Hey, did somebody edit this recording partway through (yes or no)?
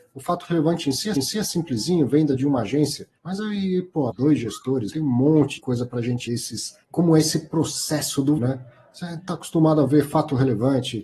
yes